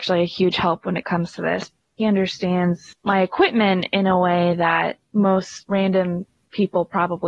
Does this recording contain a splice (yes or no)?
no